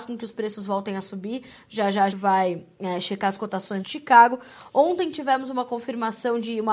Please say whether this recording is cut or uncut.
cut